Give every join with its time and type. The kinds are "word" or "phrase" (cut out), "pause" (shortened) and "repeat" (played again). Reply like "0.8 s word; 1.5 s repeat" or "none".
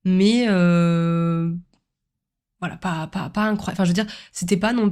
none